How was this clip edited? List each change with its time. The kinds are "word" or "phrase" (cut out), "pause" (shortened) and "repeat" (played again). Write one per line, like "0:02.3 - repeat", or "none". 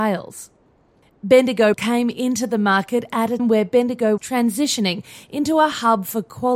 0:01.7 - word
0:03.4 - word
0:04.2 - word